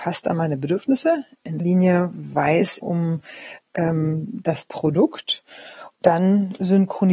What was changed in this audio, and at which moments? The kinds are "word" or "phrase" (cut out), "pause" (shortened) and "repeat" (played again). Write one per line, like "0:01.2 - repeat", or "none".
0:01.6 - word
0:02.8 - word
0:06.0 - word